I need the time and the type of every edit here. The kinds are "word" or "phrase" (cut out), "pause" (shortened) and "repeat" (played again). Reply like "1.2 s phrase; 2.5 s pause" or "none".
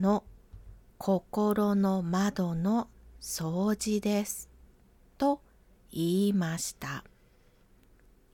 none